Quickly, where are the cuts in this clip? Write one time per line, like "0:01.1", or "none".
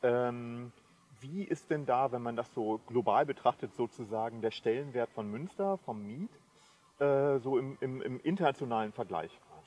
none